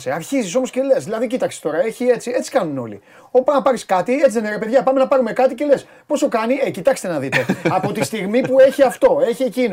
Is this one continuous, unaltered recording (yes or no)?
yes